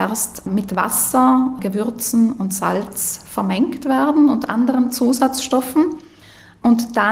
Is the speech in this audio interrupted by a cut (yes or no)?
no